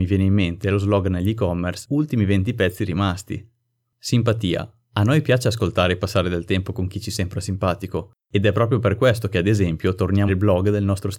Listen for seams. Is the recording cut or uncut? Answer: cut